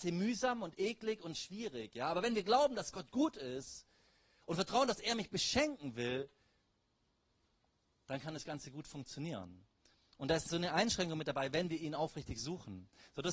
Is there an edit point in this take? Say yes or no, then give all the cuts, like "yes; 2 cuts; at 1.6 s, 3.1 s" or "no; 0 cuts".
no; 0 cuts